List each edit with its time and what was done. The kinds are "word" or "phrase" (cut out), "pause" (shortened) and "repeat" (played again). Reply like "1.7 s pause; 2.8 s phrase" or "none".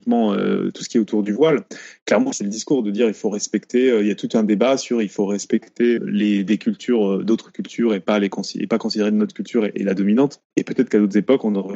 2.3 s word; 6.0 s word; 10.5 s pause